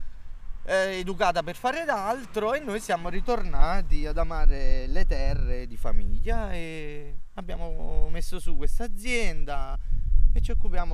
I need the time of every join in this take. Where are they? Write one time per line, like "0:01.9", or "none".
none